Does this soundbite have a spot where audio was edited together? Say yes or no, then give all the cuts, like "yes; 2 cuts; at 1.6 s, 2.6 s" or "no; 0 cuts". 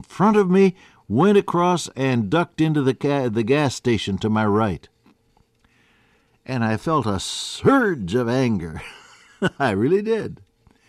no; 0 cuts